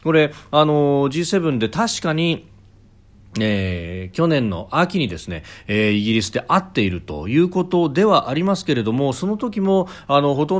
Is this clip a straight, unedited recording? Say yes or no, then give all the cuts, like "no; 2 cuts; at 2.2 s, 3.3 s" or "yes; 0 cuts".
yes; 0 cuts